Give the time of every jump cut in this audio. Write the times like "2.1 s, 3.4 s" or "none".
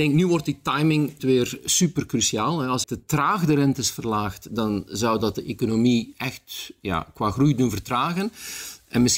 1.2 s, 2.8 s

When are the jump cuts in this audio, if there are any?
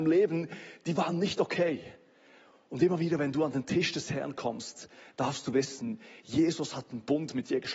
none

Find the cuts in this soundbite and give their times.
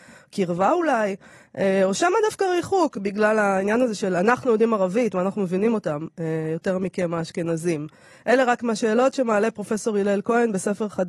8.6 s

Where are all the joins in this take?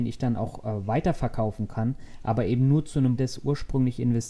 3.2 s

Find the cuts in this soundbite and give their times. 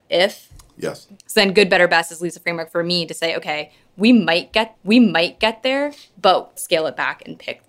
1.2 s, 4.7 s, 6.6 s

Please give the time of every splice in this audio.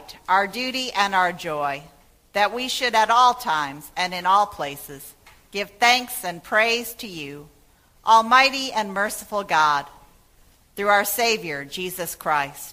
none

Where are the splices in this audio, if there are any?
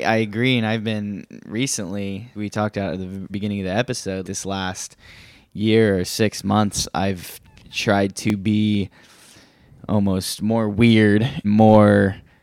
2.3 s, 3.3 s, 4.2 s, 11.4 s

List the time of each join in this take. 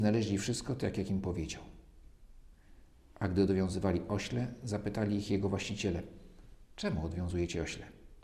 none

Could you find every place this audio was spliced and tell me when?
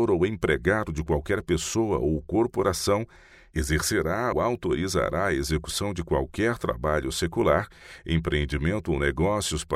4.3 s

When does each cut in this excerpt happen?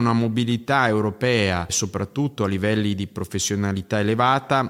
none

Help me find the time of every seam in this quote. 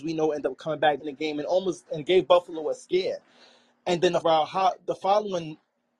1.0 s, 1.9 s, 4.2 s

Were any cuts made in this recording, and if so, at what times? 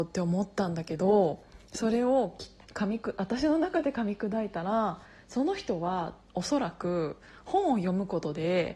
none

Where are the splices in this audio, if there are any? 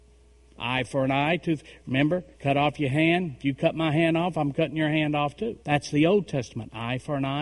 2.3 s, 5.6 s

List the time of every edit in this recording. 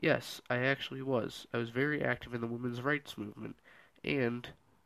none

